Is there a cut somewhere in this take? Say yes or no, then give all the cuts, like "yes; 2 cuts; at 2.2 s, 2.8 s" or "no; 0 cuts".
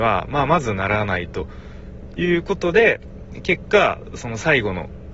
no; 0 cuts